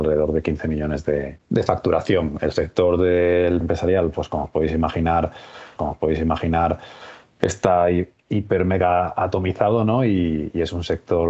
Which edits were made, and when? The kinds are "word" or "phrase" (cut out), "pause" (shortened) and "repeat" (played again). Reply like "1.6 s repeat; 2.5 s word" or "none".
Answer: 3.6 s phrase; 5.8 s repeat